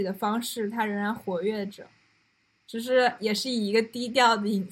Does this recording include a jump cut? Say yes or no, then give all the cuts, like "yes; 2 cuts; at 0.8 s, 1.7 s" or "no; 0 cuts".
no; 0 cuts